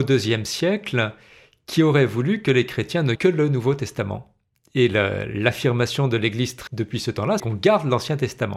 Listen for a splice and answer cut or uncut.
cut